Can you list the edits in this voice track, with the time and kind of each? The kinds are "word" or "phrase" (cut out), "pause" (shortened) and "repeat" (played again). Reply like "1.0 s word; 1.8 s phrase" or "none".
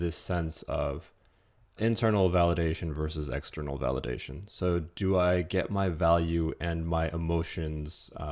1.8 s word